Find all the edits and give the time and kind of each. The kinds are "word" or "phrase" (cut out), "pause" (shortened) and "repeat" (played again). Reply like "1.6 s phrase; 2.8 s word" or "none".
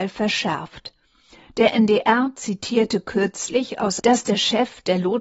4.0 s phrase